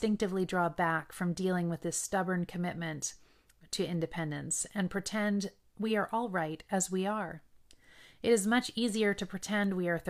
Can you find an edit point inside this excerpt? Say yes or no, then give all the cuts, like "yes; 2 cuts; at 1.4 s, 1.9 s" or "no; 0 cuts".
no; 0 cuts